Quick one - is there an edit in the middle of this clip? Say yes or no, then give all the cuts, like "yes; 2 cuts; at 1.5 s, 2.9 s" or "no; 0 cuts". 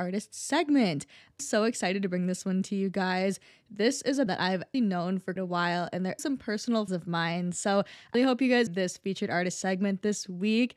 yes; 8 cuts; at 1.4 s, 4.3 s, 4.7 s, 5.4 s, 6.2 s, 6.9 s, 8.1 s, 8.7 s